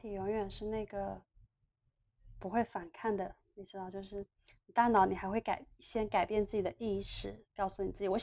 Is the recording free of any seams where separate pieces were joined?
yes; 0 cuts

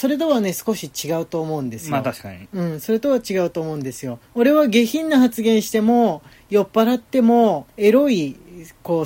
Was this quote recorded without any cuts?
no; 2 cuts; at 4.2 s, 7.7 s

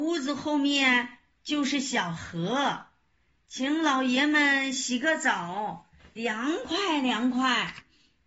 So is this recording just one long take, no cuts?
yes; 0 cuts

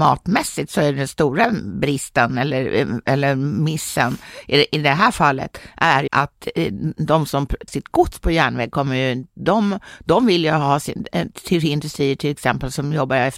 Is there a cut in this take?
yes; 2 cuts; at 6.1 s, 7.7 s

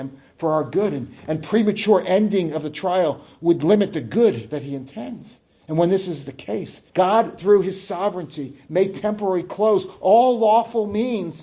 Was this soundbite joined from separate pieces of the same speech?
yes; 1 cut; at 6.9 s

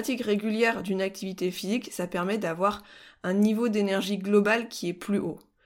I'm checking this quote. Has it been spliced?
no; 0 cuts

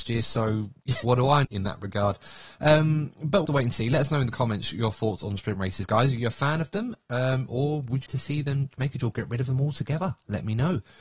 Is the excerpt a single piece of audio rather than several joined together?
no; 6 cuts; at 1.0 s, 1.4 s, 2.5 s, 3.4 s, 8.1 s, 9.0 s

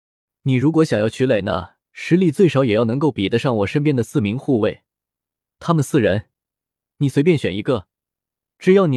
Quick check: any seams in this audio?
yes; 1 cut; at 1.8 s

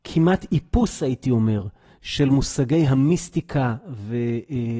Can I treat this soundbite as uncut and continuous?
yes; 0 cuts

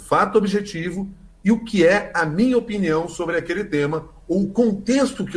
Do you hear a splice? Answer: no; 0 cuts

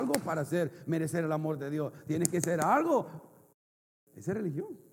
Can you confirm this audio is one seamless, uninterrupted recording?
yes; 0 cuts

